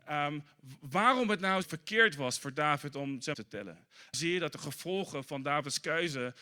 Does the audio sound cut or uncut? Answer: cut